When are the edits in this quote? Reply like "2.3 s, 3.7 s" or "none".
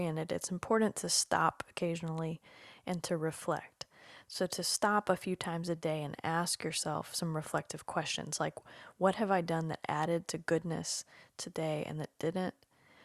none

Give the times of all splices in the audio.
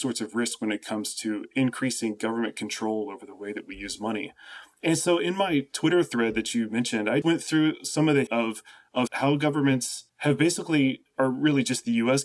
7.2 s, 8.3 s, 9.1 s, 10.1 s

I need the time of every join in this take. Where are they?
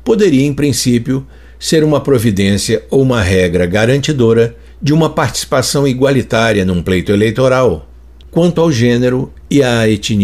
none

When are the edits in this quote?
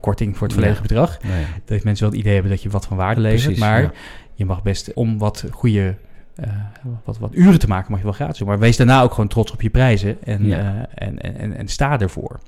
3.1 s, 4.9 s, 7.0 s, 11.4 s

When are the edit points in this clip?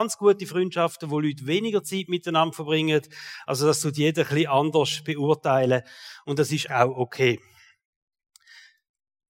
6.7 s

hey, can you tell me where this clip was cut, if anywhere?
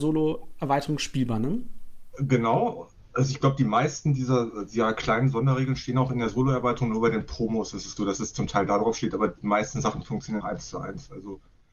8.0 s, 10.4 s

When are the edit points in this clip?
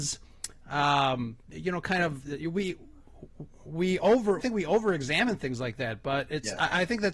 1.4 s, 4.4 s

